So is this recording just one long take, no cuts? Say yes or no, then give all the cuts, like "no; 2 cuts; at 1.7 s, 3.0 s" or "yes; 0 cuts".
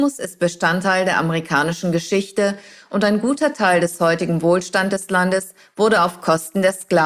yes; 0 cuts